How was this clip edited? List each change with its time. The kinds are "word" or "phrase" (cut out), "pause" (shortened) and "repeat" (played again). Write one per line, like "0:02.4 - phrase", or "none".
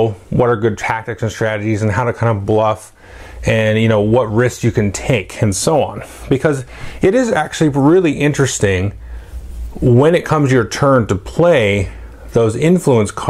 none